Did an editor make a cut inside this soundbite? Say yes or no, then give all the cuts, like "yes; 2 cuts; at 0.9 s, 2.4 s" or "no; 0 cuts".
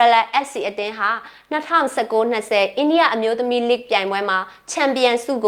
no; 0 cuts